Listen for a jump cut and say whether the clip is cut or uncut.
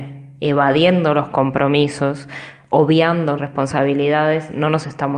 cut